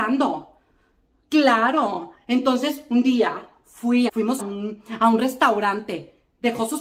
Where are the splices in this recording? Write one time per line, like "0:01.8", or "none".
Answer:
0:04.1
0:04.4